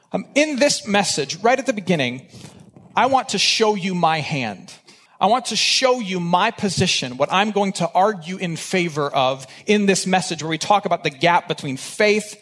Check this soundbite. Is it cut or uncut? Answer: cut